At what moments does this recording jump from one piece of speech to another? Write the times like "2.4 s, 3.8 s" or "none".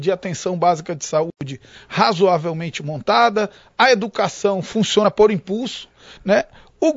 none